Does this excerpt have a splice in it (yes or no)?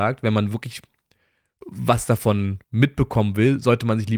yes